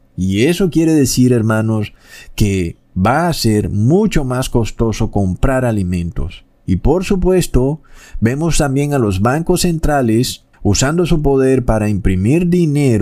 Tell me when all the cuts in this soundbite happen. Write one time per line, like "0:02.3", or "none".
0:02.8
0:06.5
0:10.5